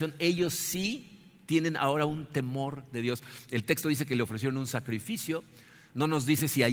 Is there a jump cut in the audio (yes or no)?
no